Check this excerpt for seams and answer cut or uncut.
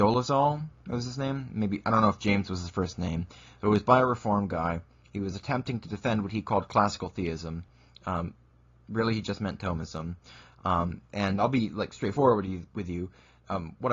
uncut